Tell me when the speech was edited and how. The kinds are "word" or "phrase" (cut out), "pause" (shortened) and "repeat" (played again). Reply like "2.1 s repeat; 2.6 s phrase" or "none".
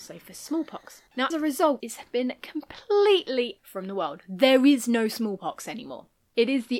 1.3 s word; 1.8 s word; 3.6 s word